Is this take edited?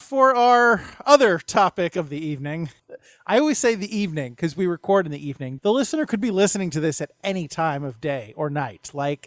yes; 1 cut; at 5.6 s

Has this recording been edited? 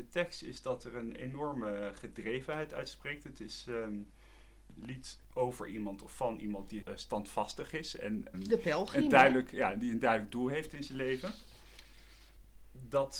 yes; 2 cuts; at 6.8 s, 8.3 s

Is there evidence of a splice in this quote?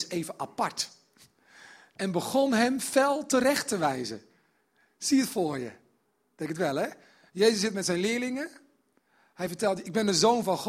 no; 0 cuts

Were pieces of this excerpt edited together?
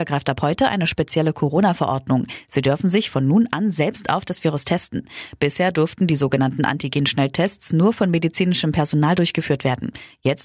no; 0 cuts

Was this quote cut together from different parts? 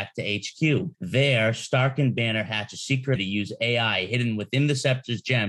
yes; 2 cuts; at 0.9 s, 3.2 s

